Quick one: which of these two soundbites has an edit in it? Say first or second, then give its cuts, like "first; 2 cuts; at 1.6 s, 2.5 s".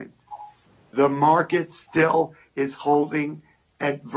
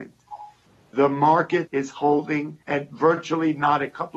second; 2 cuts; at 1.7 s, 2.6 s